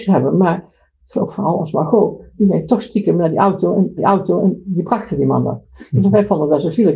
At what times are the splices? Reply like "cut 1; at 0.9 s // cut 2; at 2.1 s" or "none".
cut 1; at 1.6 s // cut 2; at 4.0 s